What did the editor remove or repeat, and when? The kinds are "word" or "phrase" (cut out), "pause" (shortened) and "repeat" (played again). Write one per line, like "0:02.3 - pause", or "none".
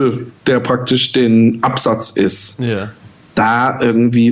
none